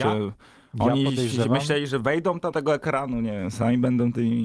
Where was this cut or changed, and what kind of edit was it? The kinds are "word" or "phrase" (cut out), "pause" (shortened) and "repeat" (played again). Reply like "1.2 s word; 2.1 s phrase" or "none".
2.5 s word